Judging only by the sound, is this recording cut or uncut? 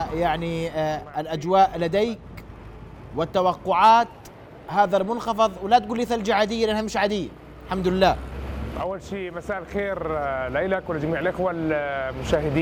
uncut